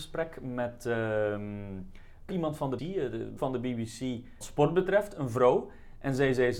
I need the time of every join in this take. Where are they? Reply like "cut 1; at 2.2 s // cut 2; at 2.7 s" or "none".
cut 1; at 2.3 s // cut 2; at 2.8 s // cut 3; at 3.4 s // cut 4; at 4.4 s